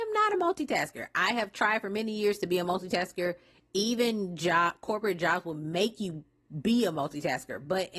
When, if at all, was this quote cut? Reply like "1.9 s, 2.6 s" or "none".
none